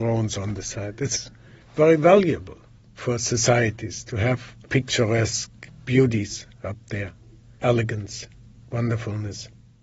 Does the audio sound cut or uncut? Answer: cut